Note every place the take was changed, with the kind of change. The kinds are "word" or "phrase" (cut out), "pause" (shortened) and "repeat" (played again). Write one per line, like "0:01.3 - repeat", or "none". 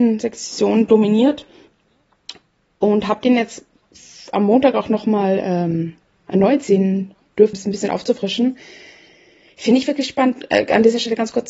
0:07.5 - word